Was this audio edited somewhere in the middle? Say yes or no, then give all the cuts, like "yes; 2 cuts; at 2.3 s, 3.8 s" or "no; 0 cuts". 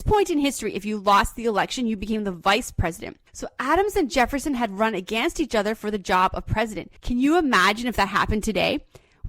yes; 2 cuts; at 3.3 s, 7.0 s